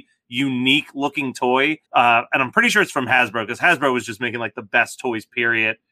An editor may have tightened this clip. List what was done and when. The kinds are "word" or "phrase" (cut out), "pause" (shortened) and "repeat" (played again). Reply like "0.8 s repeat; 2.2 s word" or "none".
1.8 s pause

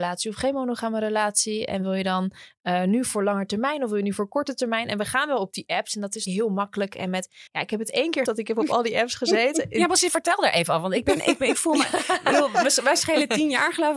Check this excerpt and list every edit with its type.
6.3 s word; 7.5 s pause; 8.3 s word

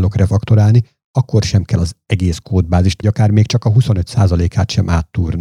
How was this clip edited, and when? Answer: 3.0 s word

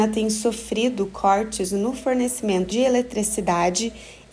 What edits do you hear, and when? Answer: 2.7 s word

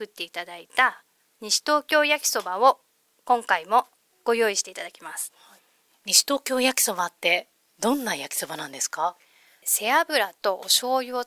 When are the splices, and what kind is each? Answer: none

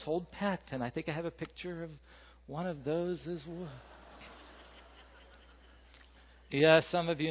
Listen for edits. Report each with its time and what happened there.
none

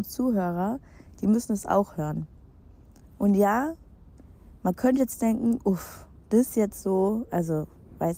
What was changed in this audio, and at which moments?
none

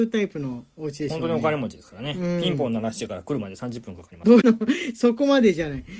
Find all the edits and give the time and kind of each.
4.4 s word

